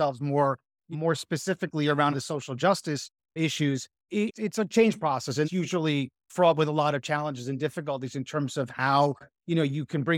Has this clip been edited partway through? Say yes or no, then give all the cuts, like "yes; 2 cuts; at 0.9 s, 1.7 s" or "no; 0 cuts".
yes; 3 cuts; at 0.9 s, 2.1 s, 5.4 s